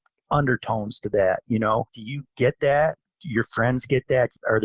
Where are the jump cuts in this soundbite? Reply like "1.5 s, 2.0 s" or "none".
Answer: 1.9 s